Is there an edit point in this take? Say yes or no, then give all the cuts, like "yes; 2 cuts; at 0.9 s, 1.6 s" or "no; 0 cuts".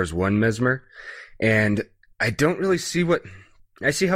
no; 0 cuts